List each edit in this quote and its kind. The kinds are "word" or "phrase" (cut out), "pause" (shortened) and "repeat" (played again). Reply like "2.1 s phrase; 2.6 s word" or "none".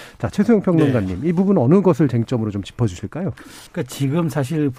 3.7 s pause